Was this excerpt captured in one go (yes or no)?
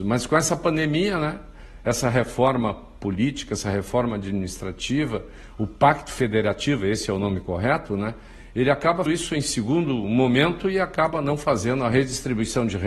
no